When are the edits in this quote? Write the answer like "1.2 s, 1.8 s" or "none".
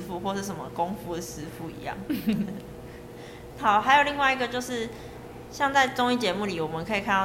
none